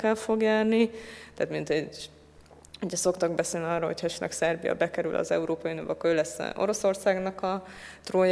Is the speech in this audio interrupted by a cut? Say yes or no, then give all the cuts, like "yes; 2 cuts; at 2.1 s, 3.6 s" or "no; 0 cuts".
no; 0 cuts